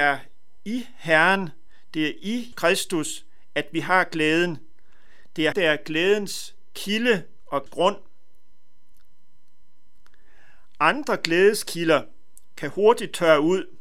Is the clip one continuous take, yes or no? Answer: no